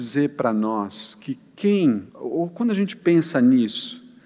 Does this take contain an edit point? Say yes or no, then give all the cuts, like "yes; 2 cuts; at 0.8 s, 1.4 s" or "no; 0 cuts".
yes; 1 cut; at 2.1 s